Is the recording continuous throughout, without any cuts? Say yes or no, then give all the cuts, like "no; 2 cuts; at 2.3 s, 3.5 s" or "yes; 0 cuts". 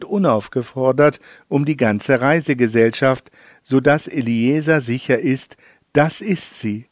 yes; 0 cuts